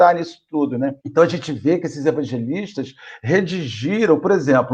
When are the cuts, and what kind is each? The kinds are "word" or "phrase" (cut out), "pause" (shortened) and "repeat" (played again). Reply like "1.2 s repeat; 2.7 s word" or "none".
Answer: 1.0 s pause